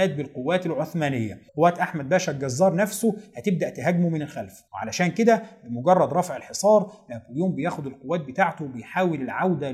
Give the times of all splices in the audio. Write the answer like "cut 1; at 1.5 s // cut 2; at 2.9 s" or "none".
cut 1; at 1.5 s // cut 2; at 4.7 s

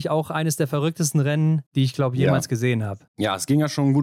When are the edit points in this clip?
cut 1; at 1.7 s // cut 2; at 3.1 s

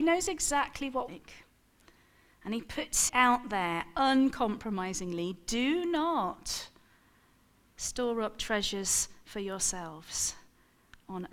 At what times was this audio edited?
cut 1; at 1.1 s // cut 2; at 3.1 s

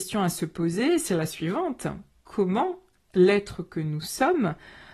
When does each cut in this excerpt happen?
none

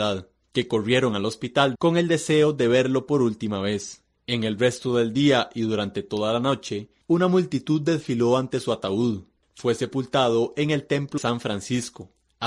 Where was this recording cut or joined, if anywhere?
cut 1; at 1.7 s // cut 2; at 11.2 s

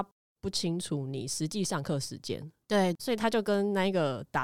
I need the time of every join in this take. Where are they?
cut 1; at 3.0 s

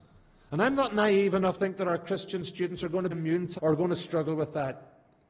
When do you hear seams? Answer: cut 1; at 1.6 s // cut 2; at 3.1 s // cut 3; at 3.6 s

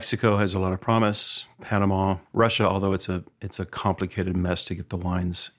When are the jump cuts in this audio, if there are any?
cut 1; at 2.3 s

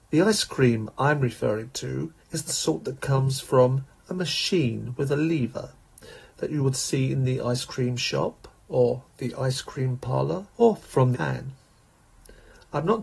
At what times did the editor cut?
cut 1; at 2.2 s // cut 2; at 10.5 s // cut 3; at 11.1 s

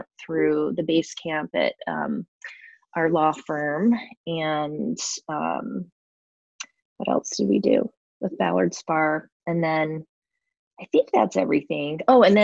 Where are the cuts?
none

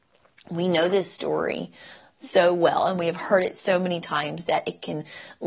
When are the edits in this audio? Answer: none

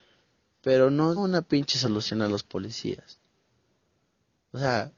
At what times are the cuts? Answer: cut 1; at 1.2 s

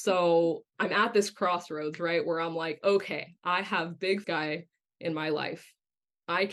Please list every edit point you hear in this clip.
cut 1; at 4.2 s

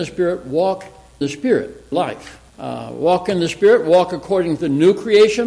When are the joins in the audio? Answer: cut 1; at 1.2 s // cut 2; at 1.9 s // cut 3; at 2.5 s

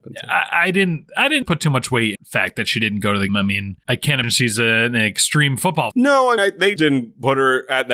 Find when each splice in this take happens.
cut 1; at 1.4 s // cut 2; at 2.2 s // cut 3; at 3.3 s // cut 4; at 3.8 s // cut 5; at 4.2 s // cut 6; at 5.9 s // cut 7; at 6.4 s // cut 8; at 6.8 s

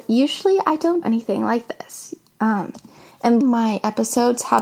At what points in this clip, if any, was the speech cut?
cut 1; at 1.0 s // cut 2; at 3.4 s

